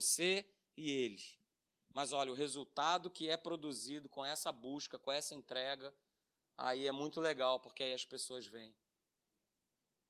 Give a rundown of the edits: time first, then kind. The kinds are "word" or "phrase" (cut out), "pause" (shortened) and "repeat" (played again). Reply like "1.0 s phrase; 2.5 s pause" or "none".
none